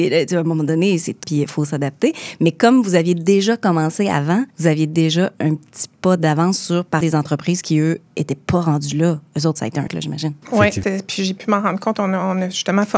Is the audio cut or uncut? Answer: cut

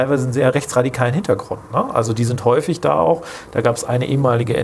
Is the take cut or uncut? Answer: uncut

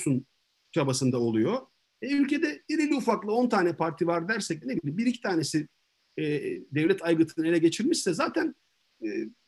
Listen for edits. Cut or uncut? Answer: cut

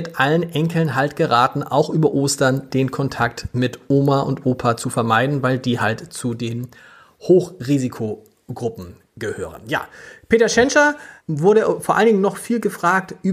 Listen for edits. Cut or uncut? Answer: uncut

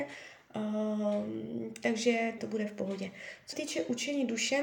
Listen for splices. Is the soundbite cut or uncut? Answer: cut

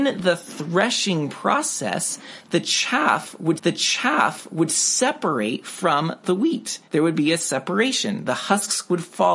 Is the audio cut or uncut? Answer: cut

